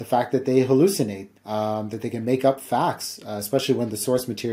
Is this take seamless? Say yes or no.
no